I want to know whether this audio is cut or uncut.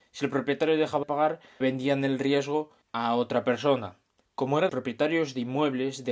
cut